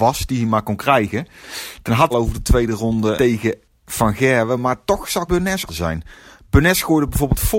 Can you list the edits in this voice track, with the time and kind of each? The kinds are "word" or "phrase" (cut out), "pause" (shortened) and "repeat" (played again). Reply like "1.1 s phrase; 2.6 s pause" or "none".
2.1 s phrase; 3.2 s word; 5.3 s word; 5.7 s phrase